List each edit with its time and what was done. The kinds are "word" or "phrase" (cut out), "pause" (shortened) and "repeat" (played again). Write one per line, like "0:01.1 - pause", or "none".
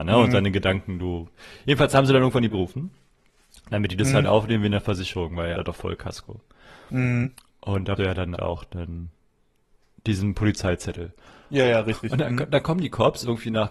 0:02.5 - word
0:05.5 - word
0:08.0 - word
0:08.3 - word